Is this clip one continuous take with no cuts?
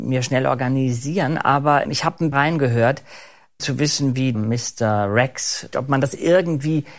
no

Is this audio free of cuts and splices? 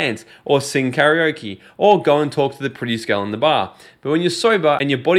yes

